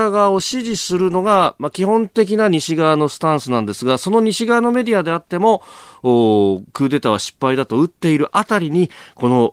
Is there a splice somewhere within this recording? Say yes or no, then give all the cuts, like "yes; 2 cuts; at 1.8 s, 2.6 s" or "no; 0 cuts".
no; 0 cuts